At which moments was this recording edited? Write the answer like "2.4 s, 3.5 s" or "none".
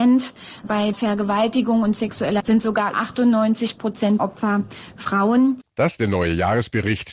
0.9 s, 2.4 s, 2.9 s, 4.2 s, 6.0 s

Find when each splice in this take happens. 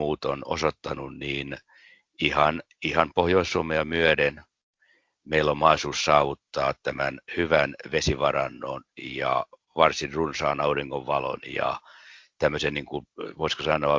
none

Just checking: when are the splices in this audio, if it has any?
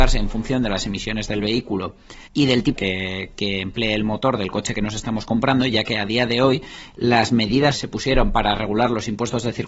2.3 s, 2.8 s, 7.7 s

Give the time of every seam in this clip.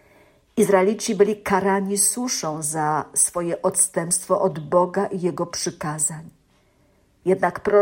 none

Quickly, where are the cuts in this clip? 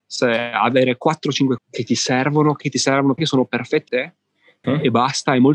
1.6 s, 2.6 s, 3.2 s, 3.9 s, 4.6 s

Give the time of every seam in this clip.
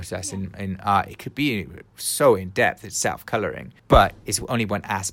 3.8 s

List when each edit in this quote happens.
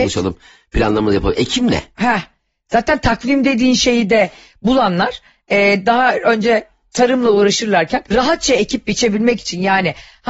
8.1 s

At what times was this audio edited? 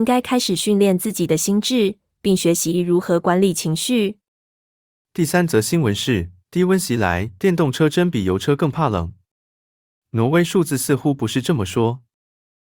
6.4 s, 7.4 s

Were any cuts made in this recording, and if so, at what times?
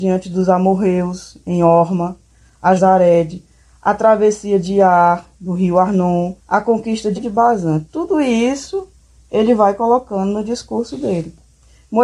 2.8 s, 6.4 s, 7.2 s

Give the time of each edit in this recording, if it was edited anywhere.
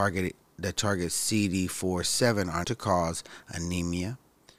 2.6 s

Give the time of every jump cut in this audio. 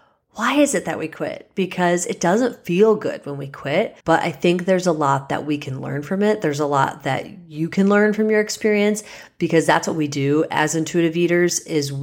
4.0 s

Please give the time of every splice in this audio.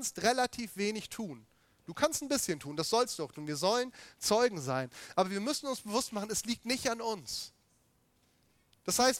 none

